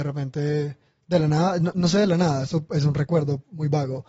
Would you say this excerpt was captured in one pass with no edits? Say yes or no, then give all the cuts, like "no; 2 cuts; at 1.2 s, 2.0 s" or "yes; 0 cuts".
yes; 0 cuts